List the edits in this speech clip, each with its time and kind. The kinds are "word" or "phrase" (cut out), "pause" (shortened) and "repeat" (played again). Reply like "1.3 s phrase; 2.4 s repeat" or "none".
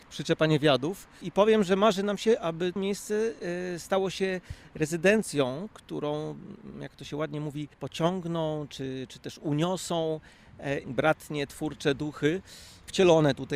2.8 s word; 7.7 s pause; 10.8 s word